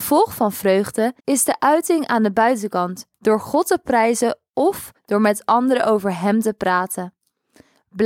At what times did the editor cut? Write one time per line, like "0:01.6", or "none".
0:01.2
0:03.1
0:05.0